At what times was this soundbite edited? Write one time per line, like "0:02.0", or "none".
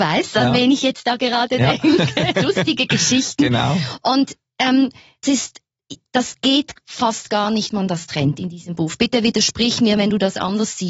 0:05.2
0:07.7